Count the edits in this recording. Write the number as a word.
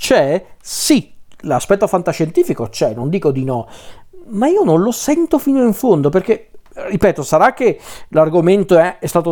zero